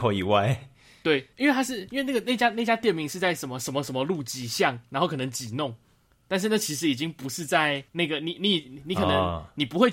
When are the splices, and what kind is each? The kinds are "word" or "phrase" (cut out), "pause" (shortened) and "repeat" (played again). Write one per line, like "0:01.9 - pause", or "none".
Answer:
0:01.3 - pause
0:07.9 - pause